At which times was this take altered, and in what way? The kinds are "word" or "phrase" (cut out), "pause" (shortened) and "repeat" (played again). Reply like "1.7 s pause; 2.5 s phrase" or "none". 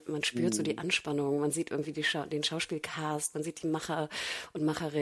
none